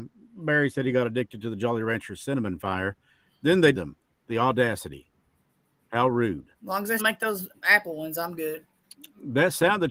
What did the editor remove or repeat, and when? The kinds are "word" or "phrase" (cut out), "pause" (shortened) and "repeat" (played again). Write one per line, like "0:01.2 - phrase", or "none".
0:03.7 - word
0:06.5 - pause
0:07.0 - word